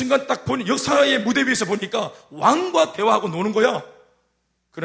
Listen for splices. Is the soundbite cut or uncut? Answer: uncut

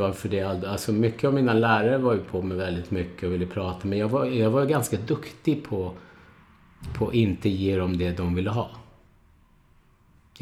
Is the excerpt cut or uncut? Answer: uncut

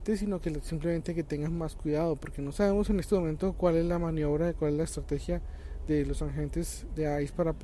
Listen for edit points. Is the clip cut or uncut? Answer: uncut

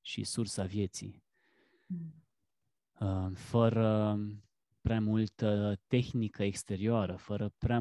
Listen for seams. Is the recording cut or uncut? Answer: cut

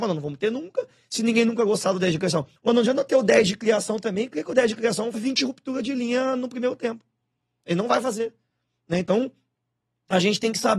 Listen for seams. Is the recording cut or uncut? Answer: cut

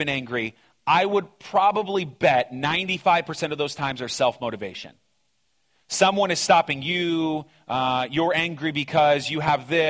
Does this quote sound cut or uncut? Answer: uncut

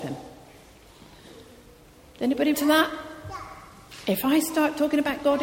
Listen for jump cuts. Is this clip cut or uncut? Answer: cut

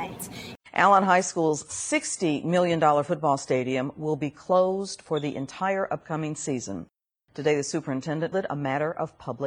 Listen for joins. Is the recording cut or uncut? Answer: cut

